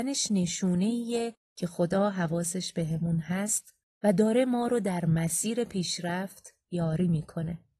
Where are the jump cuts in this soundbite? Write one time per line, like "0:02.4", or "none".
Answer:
none